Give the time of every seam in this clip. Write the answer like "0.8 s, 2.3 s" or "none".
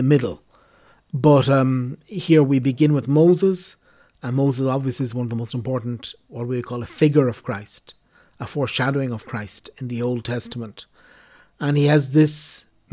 none